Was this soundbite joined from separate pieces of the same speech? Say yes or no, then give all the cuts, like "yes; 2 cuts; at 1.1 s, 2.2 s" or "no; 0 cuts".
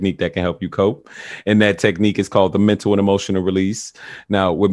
no; 0 cuts